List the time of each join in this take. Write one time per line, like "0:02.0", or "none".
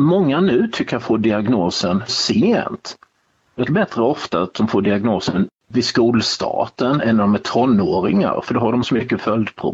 0:02.1
0:03.7
0:08.8